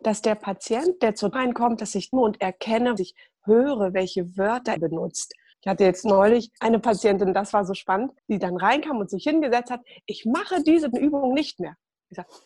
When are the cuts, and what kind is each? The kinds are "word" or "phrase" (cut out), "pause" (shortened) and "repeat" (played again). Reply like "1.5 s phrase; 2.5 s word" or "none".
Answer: 1.3 s word; 2.1 s phrase; 3.0 s phrase; 4.8 s word; 5.5 s pause; 6.6 s pause; 8.2 s pause; 10.9 s word